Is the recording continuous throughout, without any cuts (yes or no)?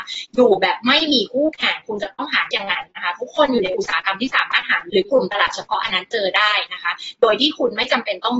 no